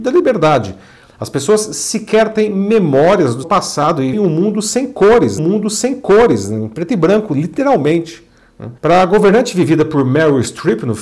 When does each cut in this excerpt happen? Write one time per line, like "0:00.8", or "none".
0:03.4
0:04.1
0:05.4
0:08.8

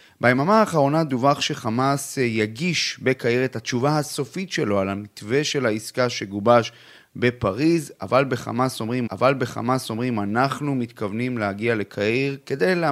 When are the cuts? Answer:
0:09.1

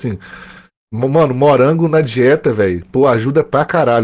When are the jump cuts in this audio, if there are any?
none

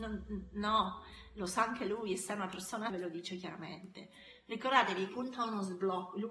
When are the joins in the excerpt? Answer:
0:02.9
0:05.1

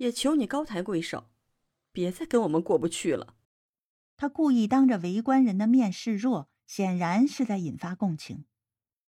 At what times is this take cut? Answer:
0:03.4

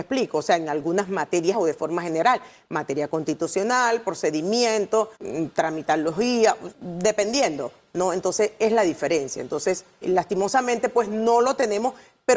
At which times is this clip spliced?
0:01.5
0:05.2
0:06.7
0:10.0

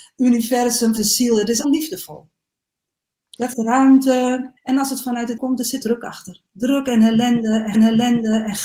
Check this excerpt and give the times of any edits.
0:01.0
0:01.6
0:03.5
0:04.6
0:05.4
0:05.8
0:07.7

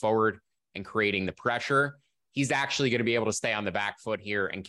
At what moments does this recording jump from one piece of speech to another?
none

